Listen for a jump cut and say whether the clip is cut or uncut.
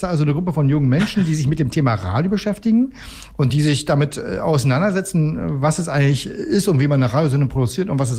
uncut